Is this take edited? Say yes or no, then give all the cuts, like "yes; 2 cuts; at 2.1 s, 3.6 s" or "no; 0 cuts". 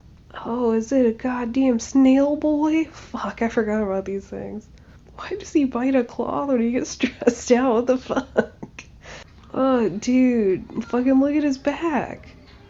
no; 0 cuts